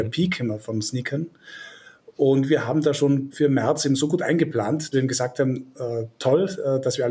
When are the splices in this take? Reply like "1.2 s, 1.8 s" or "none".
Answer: 3.3 s, 4.9 s